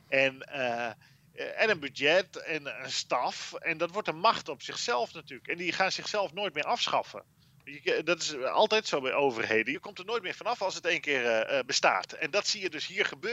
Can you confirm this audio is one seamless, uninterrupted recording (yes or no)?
yes